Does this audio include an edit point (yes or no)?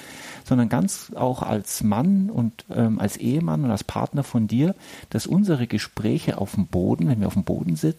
no